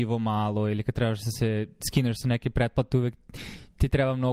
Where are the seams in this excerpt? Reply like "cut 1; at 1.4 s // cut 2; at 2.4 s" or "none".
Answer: none

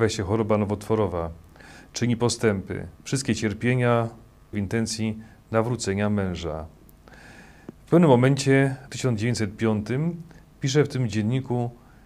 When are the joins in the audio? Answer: cut 1; at 2.9 s // cut 2; at 4.5 s // cut 3; at 8.9 s

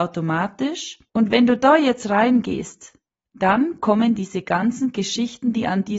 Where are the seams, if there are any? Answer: cut 1; at 1.1 s // cut 2; at 3.1 s

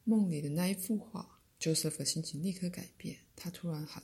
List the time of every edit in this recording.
cut 1; at 1.5 s

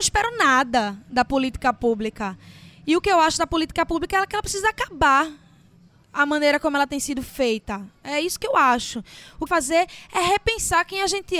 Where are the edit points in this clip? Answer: cut 1; at 9.5 s

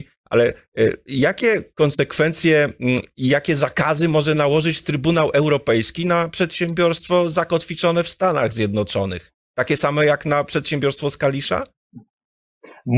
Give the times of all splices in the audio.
none

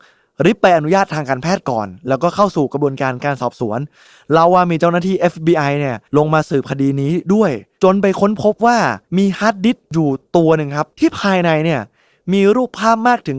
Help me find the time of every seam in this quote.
cut 1; at 6.1 s // cut 2; at 10.9 s

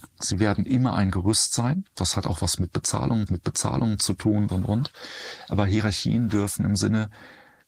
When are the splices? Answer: cut 1; at 3.3 s // cut 2; at 4.5 s

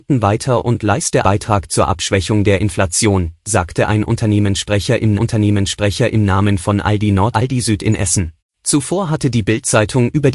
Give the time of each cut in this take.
cut 1; at 1.2 s // cut 2; at 5.2 s // cut 3; at 7.3 s // cut 4; at 8.4 s

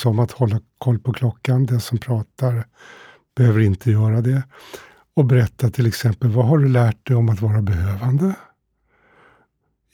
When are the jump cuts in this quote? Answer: none

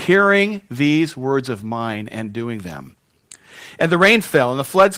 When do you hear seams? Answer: none

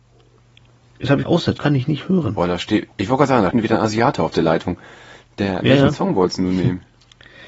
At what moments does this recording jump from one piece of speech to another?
cut 1; at 1.2 s // cut 2; at 1.6 s // cut 3; at 2.9 s // cut 4; at 3.5 s // cut 5; at 5.6 s

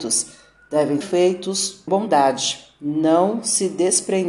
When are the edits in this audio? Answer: cut 1; at 1.0 s // cut 2; at 1.9 s

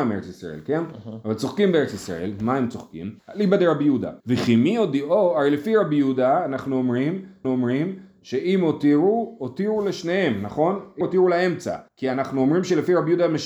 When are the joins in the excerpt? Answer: cut 1; at 3.2 s // cut 2; at 4.2 s // cut 3; at 7.4 s // cut 4; at 11.0 s // cut 5; at 11.9 s

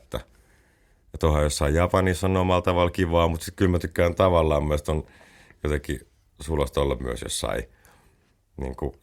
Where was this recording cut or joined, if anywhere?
none

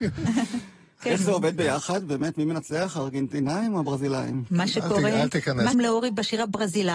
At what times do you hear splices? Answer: cut 1; at 5.7 s

